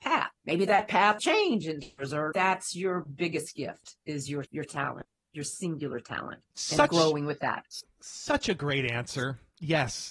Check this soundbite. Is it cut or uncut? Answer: cut